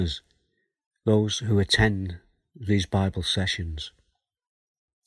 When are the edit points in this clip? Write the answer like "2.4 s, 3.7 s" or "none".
none